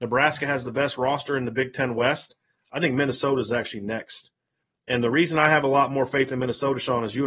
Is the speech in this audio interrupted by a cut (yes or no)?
no